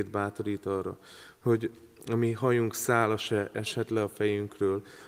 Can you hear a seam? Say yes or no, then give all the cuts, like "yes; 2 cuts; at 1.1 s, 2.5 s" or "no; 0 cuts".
no; 0 cuts